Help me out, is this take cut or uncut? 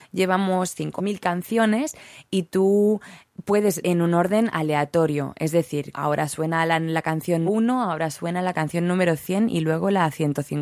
cut